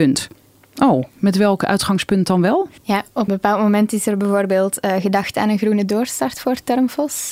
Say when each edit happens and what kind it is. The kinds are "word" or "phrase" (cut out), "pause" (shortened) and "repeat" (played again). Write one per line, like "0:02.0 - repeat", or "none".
0:02.8 - pause
0:03.3 - word